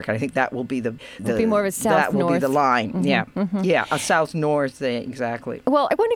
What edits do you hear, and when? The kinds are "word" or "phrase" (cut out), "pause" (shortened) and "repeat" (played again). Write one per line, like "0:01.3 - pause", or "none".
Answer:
0:01.2 - word